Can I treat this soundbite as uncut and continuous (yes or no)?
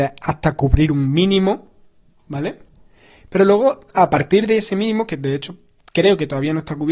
yes